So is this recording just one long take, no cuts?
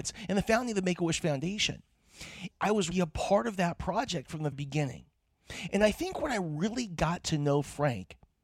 no; 3 cuts; at 2.5 s, 2.9 s, 4.5 s

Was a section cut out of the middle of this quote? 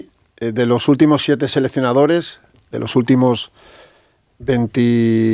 no; 0 cuts

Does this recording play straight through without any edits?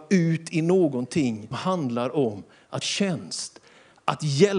no; 2 cuts; at 1.5 s, 2.8 s

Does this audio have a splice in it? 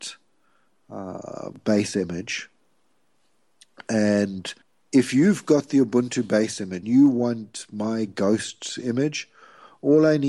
yes; 2 cuts; at 4.6 s, 6.8 s

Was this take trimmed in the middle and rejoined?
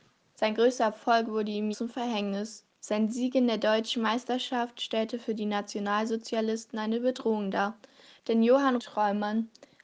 yes; 3 cuts; at 1.7 s, 2.7 s, 8.8 s

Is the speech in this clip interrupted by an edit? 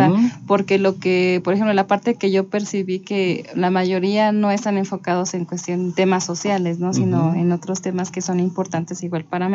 no; 0 cuts

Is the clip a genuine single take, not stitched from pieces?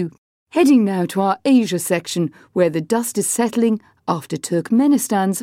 yes; 0 cuts

